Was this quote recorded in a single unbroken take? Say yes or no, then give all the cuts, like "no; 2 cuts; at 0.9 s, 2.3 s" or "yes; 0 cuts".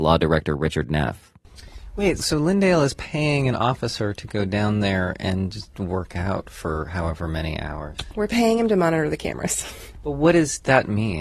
no; 1 cut; at 2.2 s